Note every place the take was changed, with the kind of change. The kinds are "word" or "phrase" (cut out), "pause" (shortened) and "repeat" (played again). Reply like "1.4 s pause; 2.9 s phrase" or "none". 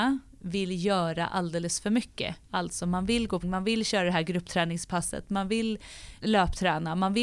2.4 s pause; 3.4 s word; 6.2 s word